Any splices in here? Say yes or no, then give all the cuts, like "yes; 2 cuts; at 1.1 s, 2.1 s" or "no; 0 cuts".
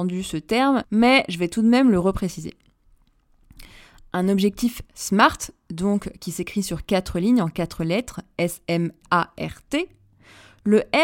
no; 0 cuts